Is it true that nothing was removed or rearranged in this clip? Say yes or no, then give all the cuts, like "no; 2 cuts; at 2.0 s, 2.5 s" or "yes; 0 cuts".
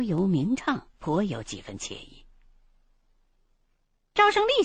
no; 1 cut; at 0.9 s